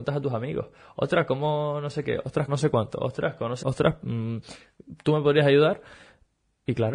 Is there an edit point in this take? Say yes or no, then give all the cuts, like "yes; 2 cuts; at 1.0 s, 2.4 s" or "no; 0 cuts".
yes; 2 cuts; at 2.5 s, 3.6 s